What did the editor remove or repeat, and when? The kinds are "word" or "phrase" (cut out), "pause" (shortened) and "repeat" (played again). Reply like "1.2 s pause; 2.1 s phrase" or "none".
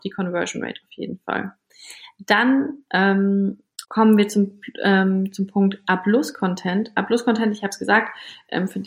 3.8 s pause